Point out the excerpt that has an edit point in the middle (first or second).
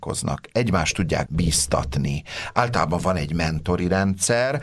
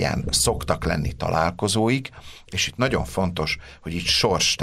first